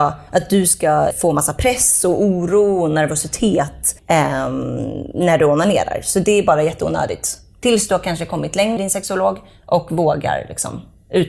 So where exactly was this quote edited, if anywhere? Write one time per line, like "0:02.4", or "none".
0:01.1
0:04.0
0:08.8